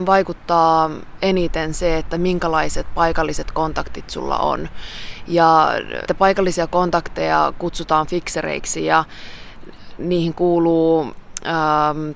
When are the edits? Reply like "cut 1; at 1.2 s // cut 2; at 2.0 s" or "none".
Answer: cut 1; at 6.1 s